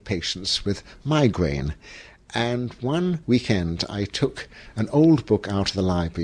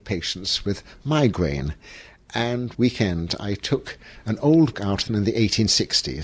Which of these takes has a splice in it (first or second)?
second